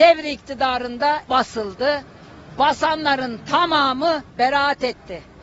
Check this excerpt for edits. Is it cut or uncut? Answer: cut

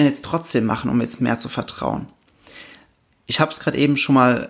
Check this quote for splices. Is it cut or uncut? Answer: uncut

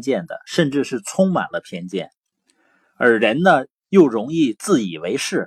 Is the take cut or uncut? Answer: uncut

